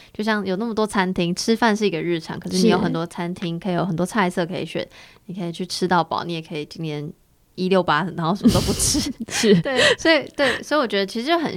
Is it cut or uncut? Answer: uncut